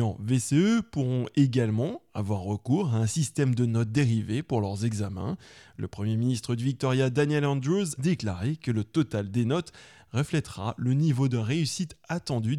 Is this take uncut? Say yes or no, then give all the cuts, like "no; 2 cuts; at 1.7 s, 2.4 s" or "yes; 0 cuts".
no; 1 cut; at 8.0 s